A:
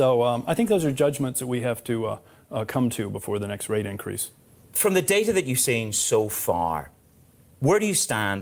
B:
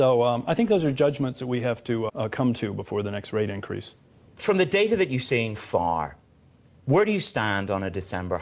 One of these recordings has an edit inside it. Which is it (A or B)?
B